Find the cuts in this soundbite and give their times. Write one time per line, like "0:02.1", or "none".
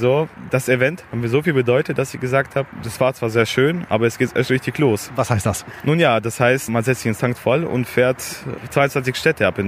0:07.2